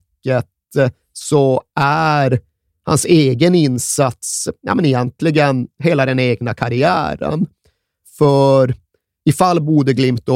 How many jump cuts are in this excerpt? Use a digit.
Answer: 0